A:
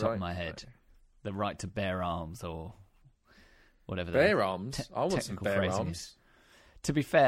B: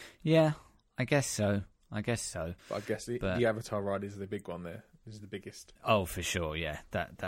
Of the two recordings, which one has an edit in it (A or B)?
B